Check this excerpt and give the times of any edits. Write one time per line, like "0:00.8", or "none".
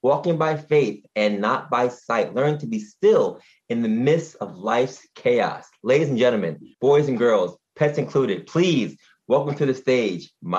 0:06.7